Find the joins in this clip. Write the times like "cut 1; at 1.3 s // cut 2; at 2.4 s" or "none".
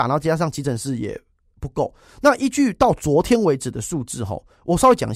none